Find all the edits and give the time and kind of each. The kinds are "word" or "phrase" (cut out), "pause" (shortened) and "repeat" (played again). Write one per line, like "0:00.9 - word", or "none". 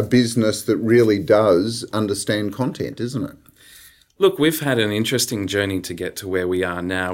none